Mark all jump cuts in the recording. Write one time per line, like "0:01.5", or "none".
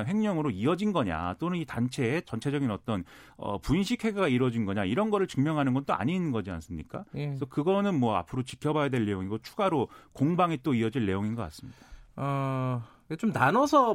none